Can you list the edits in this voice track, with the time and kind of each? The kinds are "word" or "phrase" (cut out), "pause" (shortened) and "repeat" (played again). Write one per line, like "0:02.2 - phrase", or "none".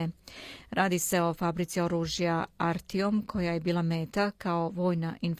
none